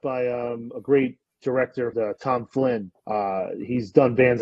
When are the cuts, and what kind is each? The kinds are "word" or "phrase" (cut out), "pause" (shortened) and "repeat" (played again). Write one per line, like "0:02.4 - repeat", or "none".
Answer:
0:01.9 - phrase
0:03.0 - pause